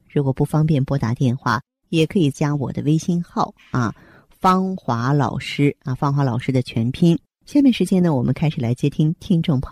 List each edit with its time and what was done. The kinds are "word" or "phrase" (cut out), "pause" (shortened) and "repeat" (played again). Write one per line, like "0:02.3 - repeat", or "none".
none